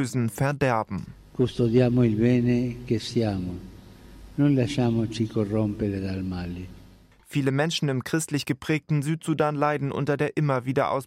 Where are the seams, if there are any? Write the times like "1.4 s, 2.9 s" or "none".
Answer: none